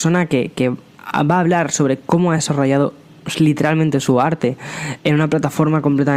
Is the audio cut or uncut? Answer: uncut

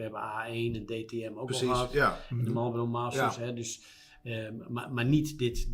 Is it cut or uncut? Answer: uncut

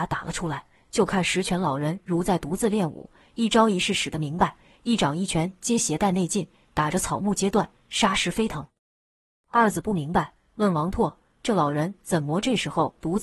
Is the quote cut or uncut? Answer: uncut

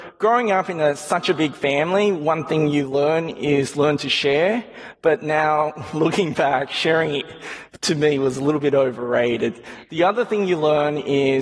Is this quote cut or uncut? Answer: uncut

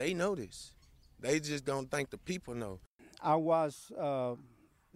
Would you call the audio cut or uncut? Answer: uncut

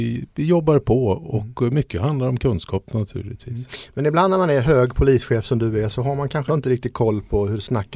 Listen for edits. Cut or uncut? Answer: cut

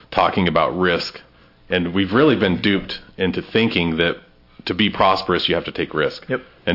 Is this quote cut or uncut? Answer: uncut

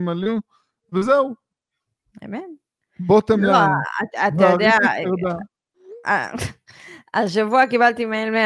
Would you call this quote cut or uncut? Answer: uncut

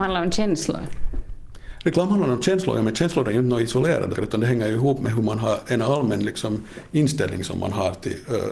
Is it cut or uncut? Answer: cut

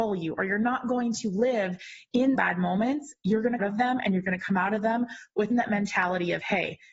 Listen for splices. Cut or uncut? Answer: cut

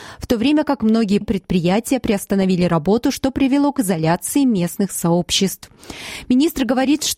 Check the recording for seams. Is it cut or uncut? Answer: cut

